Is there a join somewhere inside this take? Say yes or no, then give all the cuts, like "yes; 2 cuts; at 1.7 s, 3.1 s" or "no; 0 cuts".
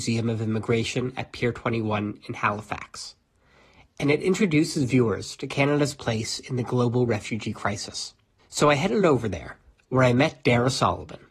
no; 0 cuts